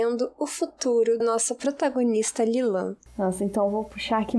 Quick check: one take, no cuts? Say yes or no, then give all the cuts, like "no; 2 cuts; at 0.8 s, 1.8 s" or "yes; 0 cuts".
no; 1 cut; at 1.2 s